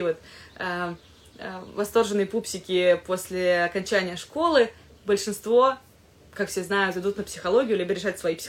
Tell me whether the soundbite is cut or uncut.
uncut